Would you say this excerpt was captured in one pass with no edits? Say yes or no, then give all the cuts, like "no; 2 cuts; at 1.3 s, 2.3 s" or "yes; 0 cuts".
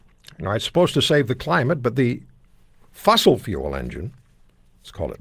yes; 0 cuts